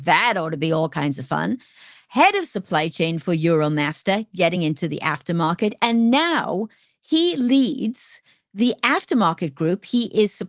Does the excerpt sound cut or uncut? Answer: uncut